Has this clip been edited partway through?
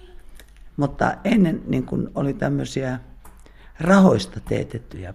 no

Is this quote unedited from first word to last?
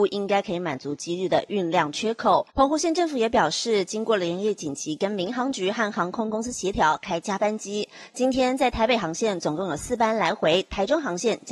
no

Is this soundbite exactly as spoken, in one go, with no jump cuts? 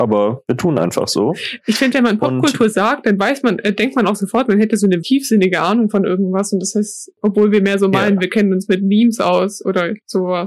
no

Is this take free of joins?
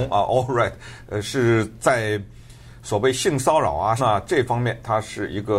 no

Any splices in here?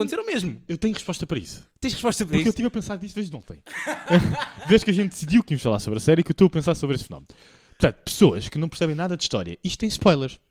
no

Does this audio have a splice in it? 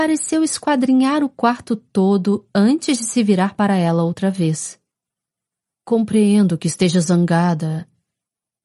no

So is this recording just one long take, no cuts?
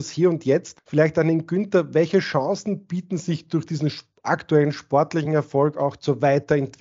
yes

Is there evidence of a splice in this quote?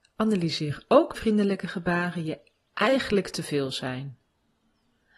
yes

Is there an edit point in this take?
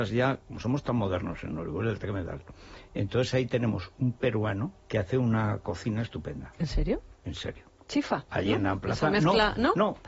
yes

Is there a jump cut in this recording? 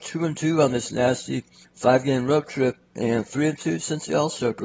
no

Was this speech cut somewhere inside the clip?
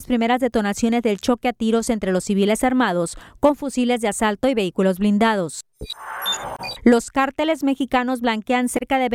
no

